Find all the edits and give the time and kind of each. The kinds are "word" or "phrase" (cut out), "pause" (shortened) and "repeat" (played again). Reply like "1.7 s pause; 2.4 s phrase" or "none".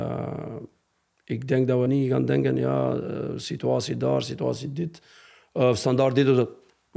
1.9 s word